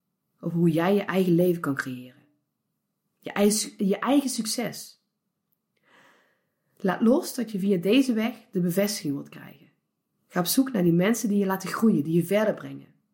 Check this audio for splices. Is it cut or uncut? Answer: uncut